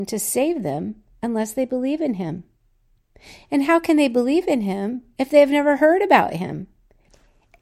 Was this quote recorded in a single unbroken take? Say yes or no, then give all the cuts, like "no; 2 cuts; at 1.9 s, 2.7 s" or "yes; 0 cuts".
yes; 0 cuts